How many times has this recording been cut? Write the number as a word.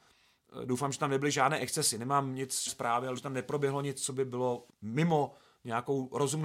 three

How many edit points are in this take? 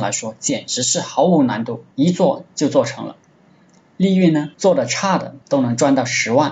three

